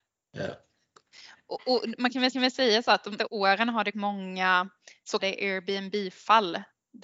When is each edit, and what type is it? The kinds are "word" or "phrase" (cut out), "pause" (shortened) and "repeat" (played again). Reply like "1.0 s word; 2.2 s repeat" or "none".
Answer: 2.3 s repeat; 3.2 s word; 3.9 s phrase; 5.2 s word